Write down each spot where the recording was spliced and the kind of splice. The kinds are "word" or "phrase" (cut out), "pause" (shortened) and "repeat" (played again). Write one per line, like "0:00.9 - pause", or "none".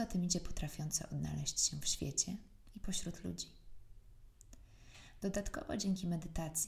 none